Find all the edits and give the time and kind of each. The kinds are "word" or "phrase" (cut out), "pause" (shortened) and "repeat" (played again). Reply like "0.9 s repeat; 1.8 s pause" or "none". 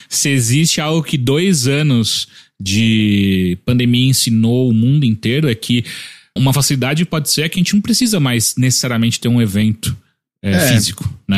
6.4 s word